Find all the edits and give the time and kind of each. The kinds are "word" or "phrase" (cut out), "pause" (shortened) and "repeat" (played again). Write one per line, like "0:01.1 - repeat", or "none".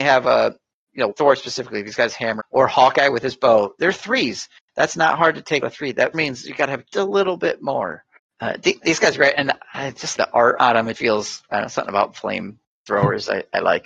0:01.1 - word
0:02.4 - word
0:05.6 - word
0:06.1 - word
0:06.9 - word
0:08.8 - word
0:10.2 - word
0:10.9 - word